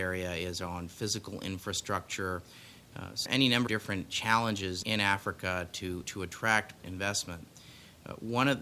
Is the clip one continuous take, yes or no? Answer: no